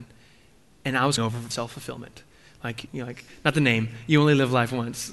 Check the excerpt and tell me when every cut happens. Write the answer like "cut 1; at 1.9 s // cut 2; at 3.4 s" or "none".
cut 1; at 1.2 s // cut 2; at 1.5 s // cut 3; at 2.9 s